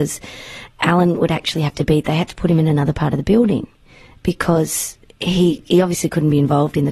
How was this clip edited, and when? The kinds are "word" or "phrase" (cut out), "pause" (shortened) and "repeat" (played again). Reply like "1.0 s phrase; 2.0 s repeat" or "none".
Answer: none